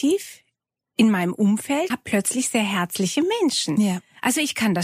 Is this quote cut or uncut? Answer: cut